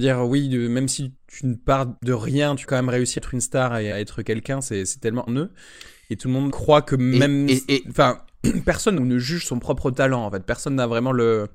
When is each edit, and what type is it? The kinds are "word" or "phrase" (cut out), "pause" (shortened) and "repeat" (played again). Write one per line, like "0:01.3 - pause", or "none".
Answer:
0:01.2 - word
0:02.0 - pause
0:02.6 - word
0:03.2 - word
0:03.9 - word
0:05.3 - phrase
0:06.5 - word
0:09.0 - phrase